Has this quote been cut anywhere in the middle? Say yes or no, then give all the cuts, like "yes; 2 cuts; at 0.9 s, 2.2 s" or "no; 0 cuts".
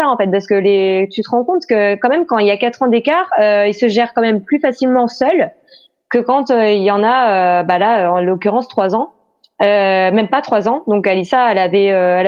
no; 0 cuts